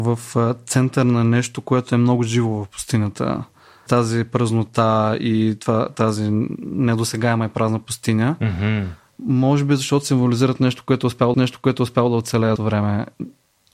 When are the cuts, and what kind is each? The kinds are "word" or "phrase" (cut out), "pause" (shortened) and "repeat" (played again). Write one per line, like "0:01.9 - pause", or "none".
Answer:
0:03.9 - word
0:11.3 - repeat
0:12.6 - word